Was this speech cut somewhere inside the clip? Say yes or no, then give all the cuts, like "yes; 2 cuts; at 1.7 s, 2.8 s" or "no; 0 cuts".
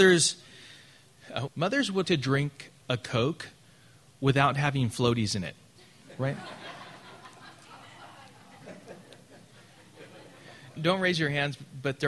yes; 3 cuts; at 1.5 s, 2.0 s, 10.8 s